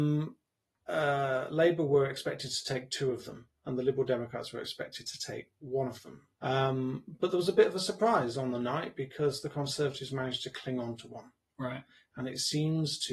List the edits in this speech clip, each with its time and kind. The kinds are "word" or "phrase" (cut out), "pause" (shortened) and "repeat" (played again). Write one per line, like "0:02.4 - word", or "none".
0:06.3 - pause